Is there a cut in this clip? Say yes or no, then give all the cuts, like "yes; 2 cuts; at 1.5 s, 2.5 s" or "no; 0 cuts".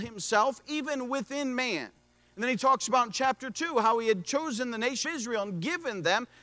yes; 1 cut; at 5.0 s